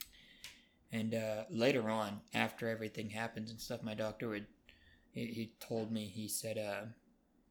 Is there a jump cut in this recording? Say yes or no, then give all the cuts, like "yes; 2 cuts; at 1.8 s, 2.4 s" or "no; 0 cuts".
no; 0 cuts